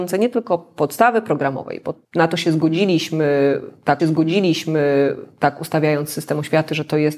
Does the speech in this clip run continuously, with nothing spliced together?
no; 2 cuts; at 2.0 s, 4.0 s

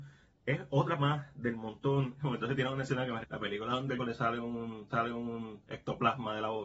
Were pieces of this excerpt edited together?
yes; 4 cuts; at 1.0 s, 3.2 s, 4.0 s, 4.9 s

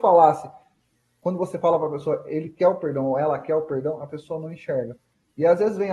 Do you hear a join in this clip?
no; 0 cuts

